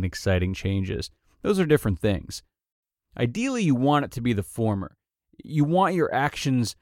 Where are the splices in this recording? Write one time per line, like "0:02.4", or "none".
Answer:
none